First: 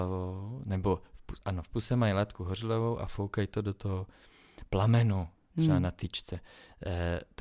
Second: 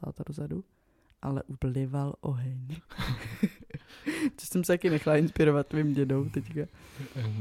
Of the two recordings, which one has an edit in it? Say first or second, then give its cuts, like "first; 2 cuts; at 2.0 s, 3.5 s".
second; 1 cut; at 1.6 s